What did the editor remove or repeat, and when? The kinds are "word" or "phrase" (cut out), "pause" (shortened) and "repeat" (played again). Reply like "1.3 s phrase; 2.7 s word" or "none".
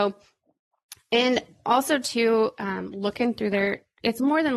none